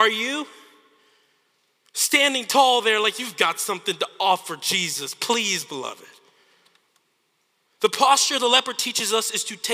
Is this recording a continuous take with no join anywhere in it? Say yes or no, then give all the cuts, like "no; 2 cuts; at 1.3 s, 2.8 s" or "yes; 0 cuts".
yes; 0 cuts